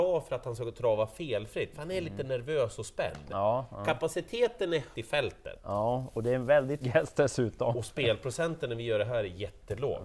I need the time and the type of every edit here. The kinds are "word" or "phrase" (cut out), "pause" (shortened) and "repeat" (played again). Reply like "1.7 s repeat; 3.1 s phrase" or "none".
4.9 s word; 6.8 s word